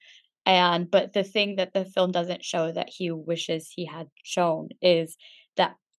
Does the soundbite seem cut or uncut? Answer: cut